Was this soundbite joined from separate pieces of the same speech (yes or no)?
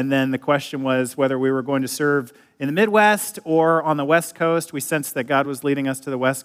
no